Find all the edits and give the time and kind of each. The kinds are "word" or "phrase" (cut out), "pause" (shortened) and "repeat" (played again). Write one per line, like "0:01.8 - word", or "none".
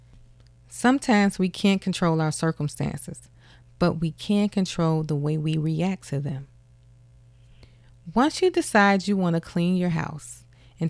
none